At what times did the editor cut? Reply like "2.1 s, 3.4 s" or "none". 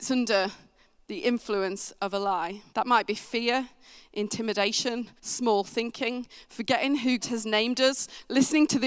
2.7 s, 5.2 s, 7.2 s